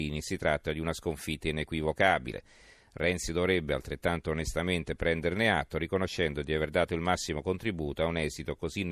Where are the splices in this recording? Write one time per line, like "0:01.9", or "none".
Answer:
none

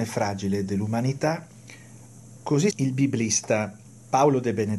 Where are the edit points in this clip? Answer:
0:02.7
0:03.8

